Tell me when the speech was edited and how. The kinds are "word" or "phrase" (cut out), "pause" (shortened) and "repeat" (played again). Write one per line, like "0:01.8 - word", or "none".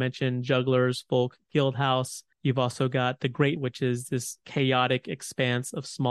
0:02.3 - pause
0:03.6 - word
0:04.4 - word